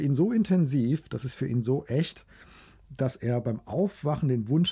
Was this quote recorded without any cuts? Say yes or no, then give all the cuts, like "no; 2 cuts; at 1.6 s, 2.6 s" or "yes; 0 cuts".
yes; 0 cuts